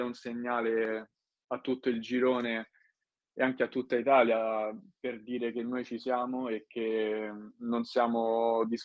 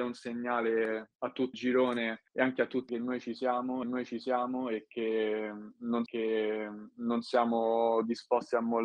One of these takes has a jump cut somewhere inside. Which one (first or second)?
second